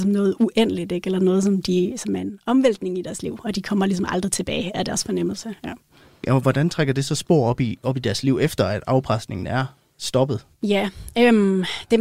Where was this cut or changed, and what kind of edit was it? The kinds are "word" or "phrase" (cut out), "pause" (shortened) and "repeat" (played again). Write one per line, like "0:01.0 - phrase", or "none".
none